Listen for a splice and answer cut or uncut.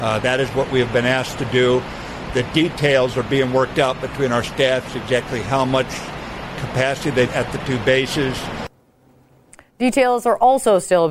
cut